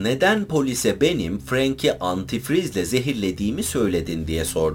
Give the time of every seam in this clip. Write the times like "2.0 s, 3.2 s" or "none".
none